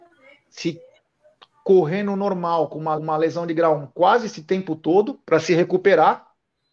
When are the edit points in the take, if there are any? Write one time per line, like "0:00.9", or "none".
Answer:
0:02.9
0:05.2